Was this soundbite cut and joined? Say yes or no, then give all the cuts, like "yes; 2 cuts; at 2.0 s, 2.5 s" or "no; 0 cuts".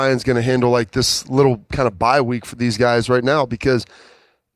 no; 0 cuts